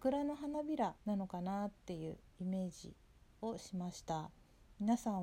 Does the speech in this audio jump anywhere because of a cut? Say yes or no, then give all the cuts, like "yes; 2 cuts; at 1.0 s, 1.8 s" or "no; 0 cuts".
yes; 1 cut; at 1.0 s